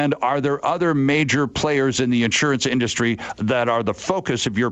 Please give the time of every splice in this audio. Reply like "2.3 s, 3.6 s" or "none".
none